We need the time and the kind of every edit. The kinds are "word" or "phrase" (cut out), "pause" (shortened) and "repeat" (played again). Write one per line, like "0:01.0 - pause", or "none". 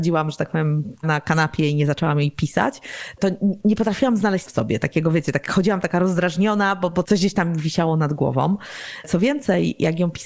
0:01.0 - word
0:03.2 - word
0:03.6 - word
0:04.4 - word
0:07.0 - word